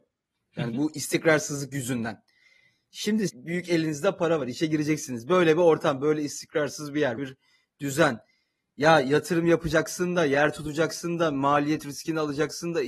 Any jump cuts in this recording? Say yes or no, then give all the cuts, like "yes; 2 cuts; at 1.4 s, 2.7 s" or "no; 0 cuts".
yes; 2 cuts; at 3.3 s, 7.2 s